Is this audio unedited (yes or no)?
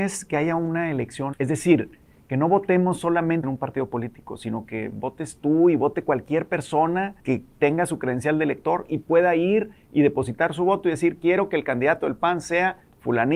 no